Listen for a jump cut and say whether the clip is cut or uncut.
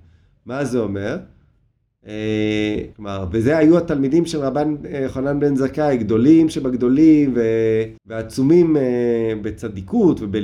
cut